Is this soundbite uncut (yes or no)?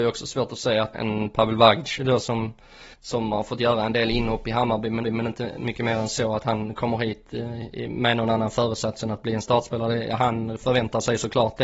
no